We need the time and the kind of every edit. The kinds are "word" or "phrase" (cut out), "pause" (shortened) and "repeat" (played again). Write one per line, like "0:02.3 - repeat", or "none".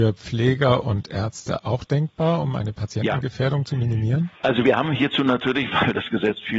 0:04.4 - pause

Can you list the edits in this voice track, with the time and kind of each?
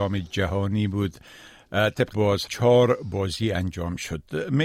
0:02.1 - word
0:02.5 - word

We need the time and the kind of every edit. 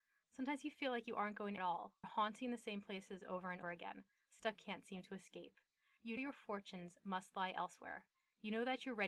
0:01.6 - phrase
0:02.0 - phrase
0:03.6 - word
0:04.6 - phrase
0:06.2 - word

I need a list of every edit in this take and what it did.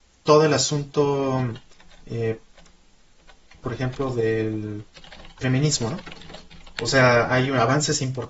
0:03.6 - word
0:05.4 - word

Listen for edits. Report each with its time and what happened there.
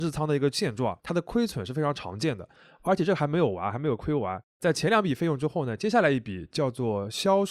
0:01.0 - pause

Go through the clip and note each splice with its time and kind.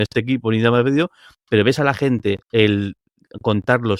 0:02.4 - pause

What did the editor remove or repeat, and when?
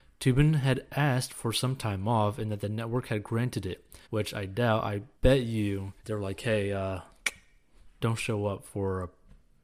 0:04.0 - pause
0:05.1 - pause
0:06.0 - pause

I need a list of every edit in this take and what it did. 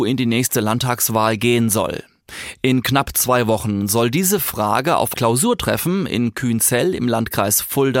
0:05.1 - word

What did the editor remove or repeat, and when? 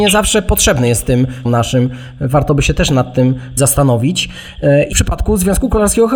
0:01.4 - word
0:03.6 - word
0:04.9 - word

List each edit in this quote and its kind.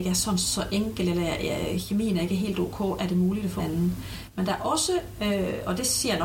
0:03.6 - word

